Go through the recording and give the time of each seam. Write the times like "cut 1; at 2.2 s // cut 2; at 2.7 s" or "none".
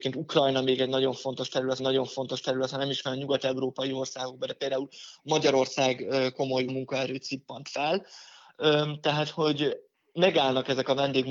cut 1; at 1.8 s // cut 2; at 3.0 s // cut 3; at 6.7 s